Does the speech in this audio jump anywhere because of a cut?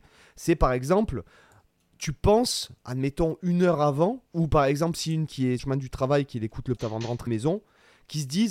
yes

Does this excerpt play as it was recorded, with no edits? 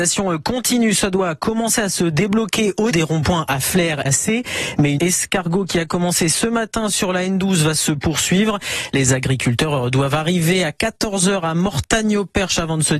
no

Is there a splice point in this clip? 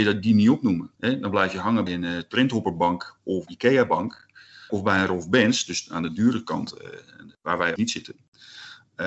yes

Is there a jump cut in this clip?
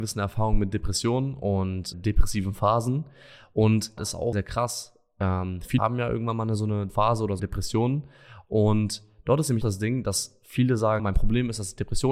yes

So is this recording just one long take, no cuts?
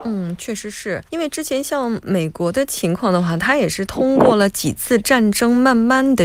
no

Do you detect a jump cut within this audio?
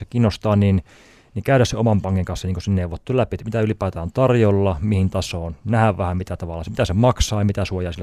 no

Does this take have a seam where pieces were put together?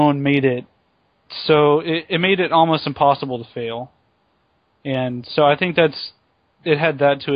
no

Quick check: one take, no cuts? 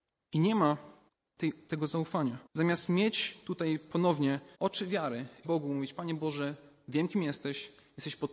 no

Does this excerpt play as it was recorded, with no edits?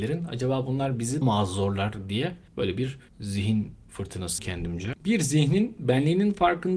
no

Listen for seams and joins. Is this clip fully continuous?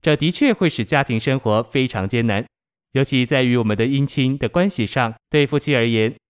no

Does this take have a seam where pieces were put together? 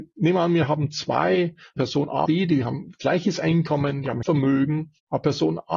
yes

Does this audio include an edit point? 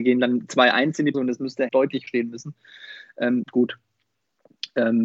yes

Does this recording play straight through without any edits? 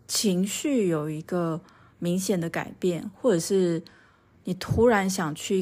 yes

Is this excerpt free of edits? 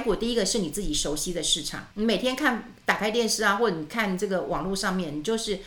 no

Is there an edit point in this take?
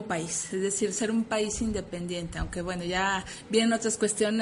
no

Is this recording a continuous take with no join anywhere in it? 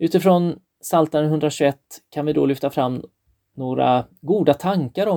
yes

